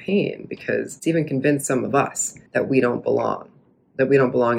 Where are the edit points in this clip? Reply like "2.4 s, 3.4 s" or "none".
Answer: 1.0 s, 2.5 s

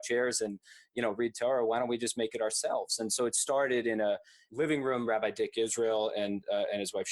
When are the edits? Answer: none

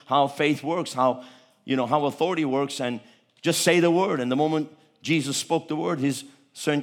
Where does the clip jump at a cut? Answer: none

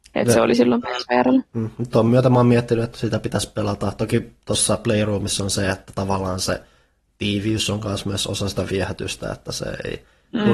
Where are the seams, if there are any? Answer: none

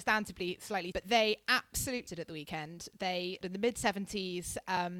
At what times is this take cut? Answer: 0.9 s, 2.1 s, 3.4 s

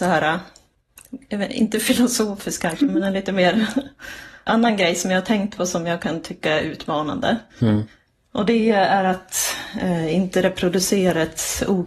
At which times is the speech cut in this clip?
4.5 s, 7.5 s

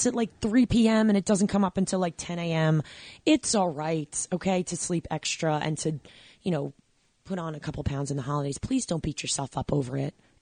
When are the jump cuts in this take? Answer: none

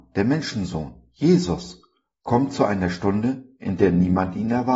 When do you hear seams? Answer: none

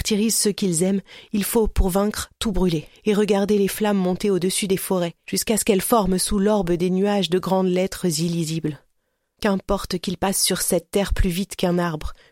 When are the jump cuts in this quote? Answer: none

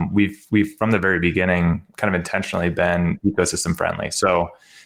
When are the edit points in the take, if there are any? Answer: 1.9 s

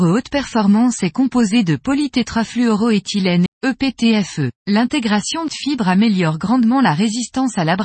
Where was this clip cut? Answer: 3.5 s, 4.6 s, 5.5 s

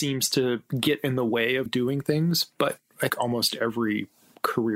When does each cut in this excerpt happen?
1.7 s, 3.1 s

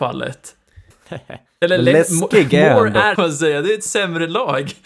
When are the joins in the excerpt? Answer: 0.9 s, 3.2 s

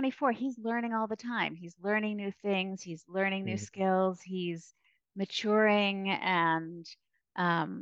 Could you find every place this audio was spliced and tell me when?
none

